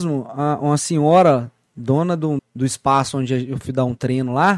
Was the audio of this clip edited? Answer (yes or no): yes